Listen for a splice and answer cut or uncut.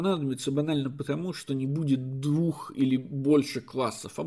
uncut